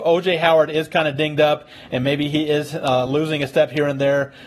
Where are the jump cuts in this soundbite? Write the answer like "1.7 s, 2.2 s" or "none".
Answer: none